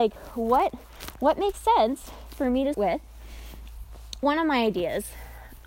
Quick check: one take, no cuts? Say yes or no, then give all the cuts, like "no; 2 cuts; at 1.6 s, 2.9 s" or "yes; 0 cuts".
no; 2 cuts; at 2.7 s, 4.2 s